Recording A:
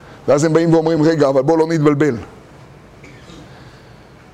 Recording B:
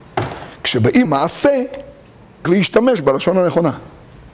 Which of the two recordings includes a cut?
B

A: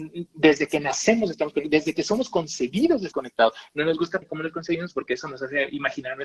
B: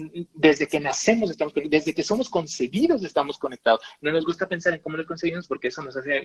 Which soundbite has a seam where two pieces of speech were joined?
A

